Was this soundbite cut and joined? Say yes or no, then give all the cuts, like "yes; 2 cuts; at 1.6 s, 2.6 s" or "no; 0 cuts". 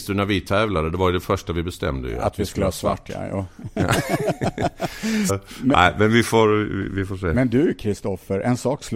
yes; 1 cut; at 5.3 s